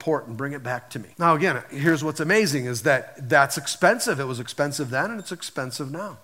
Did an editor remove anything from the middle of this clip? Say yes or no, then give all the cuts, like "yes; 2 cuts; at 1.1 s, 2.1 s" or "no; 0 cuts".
yes; 1 cut; at 1.1 s